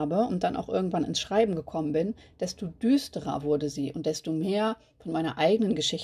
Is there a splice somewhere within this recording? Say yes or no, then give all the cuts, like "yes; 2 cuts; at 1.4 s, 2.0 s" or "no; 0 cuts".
no; 0 cuts